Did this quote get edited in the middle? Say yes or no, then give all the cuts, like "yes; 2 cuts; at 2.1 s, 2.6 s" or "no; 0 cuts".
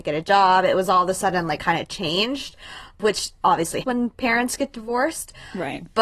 yes; 2 cuts; at 1.6 s, 3.8 s